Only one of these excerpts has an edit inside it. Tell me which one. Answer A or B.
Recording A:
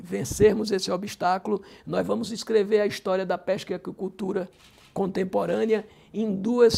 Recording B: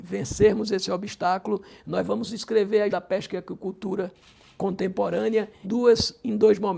B